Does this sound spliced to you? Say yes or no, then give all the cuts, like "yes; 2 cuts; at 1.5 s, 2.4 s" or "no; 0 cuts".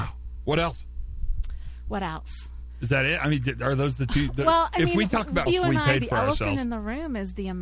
yes; 1 cut; at 5.5 s